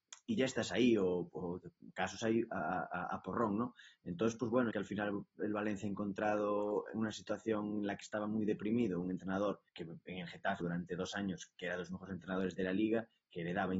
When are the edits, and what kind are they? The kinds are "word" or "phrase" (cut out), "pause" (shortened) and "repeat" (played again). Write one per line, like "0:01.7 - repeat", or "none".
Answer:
0:04.7 - phrase
0:09.7 - pause
0:10.6 - phrase